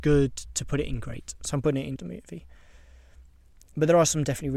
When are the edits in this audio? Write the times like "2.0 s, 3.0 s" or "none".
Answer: 2.0 s